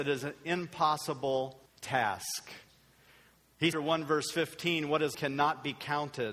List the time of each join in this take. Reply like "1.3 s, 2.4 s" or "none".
1.7 s, 3.7 s, 5.1 s